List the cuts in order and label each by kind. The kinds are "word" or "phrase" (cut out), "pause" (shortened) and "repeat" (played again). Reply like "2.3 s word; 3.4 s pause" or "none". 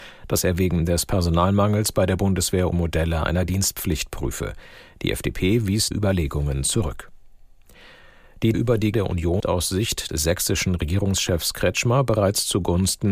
2.7 s word; 5.9 s word; 8.5 s word; 8.9 s word; 9.4 s word; 10.1 s word